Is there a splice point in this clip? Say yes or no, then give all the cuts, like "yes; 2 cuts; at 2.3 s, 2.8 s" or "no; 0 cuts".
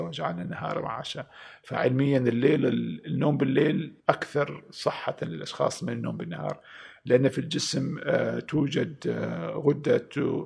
yes; 1 cut; at 4.0 s